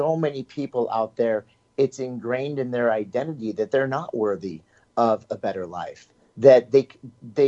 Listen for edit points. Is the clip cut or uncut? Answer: uncut